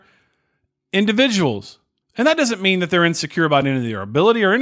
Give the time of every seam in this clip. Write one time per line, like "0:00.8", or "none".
none